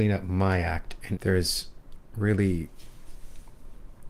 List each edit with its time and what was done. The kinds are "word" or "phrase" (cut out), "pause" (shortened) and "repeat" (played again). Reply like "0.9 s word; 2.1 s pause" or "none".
1.2 s phrase